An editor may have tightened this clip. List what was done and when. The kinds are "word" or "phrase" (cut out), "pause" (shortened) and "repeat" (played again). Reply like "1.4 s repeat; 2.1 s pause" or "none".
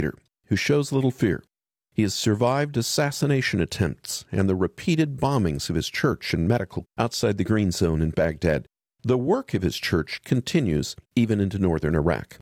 6.8 s word; 11.0 s pause